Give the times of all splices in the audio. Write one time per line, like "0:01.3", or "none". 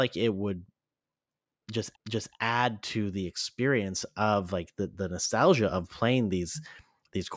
0:02.0